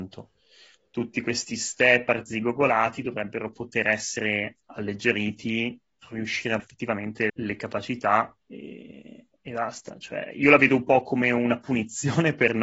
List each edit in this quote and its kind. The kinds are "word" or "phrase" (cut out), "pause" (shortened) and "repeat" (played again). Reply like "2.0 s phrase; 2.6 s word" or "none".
6.0 s word; 6.6 s word; 7.3 s word; 8.4 s pause